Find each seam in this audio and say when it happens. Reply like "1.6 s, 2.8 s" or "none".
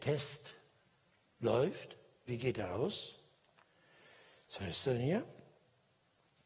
2.3 s